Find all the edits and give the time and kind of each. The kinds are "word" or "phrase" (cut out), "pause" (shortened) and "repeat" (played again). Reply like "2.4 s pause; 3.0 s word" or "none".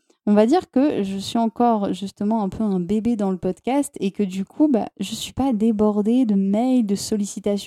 none

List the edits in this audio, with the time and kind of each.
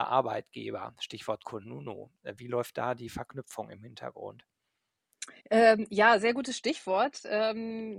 5.4 s pause

